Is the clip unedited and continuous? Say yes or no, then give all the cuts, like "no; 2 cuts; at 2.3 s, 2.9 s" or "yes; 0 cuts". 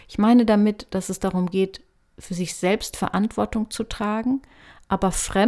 yes; 0 cuts